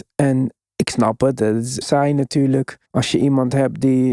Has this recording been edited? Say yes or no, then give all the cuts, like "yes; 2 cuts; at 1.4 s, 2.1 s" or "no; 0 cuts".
yes; 2 cuts; at 1.8 s, 2.8 s